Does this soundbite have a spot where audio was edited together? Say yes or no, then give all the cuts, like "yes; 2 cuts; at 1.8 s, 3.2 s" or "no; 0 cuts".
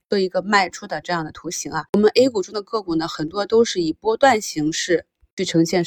yes; 1 cut; at 1.9 s